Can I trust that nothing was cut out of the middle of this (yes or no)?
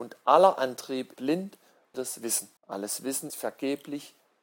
no